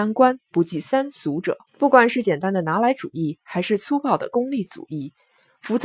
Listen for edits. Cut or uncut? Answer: cut